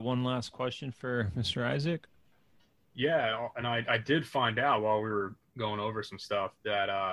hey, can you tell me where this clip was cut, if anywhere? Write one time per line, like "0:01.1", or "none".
none